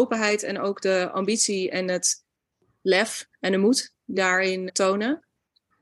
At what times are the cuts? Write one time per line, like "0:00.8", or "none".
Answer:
0:04.2
0:04.7